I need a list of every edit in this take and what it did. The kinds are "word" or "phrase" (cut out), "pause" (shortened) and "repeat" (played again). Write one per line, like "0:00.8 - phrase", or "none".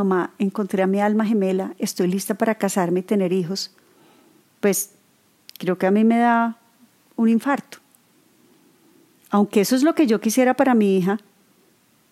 none

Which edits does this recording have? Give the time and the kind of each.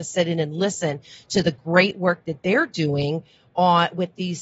none

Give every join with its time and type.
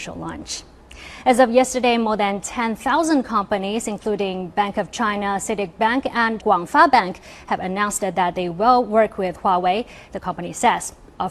0:06.4 - word

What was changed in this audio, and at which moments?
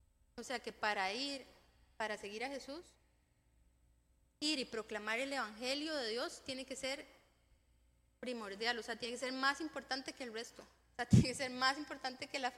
none

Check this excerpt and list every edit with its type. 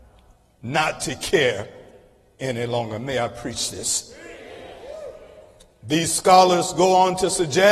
none

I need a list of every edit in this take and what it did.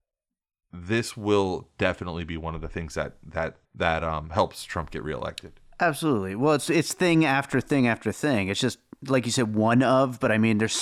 0:03.6 - pause

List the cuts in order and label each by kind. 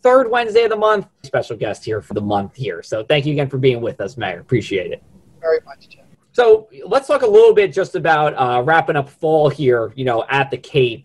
0:01.2 - word
0:02.1 - phrase
0:06.1 - pause

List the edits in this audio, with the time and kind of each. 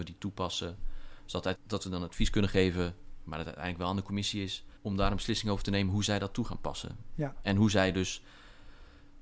0:01.5 - word
0:04.8 - pause

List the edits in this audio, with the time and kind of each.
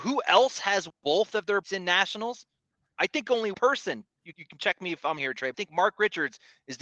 0:00.9 - word
0:01.6 - word
0:03.5 - word
0:04.3 - word
0:05.2 - word
0:05.5 - word

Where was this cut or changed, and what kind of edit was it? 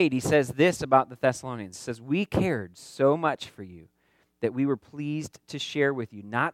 none

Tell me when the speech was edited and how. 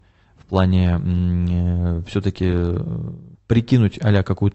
0:03.3 - pause

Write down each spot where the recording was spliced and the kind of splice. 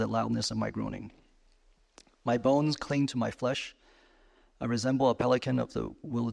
none

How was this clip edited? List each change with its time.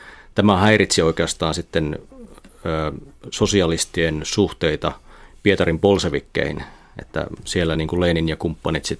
none

